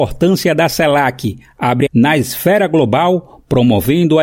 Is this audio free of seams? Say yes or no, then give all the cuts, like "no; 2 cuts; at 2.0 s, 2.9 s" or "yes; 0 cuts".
no; 1 cut; at 1.9 s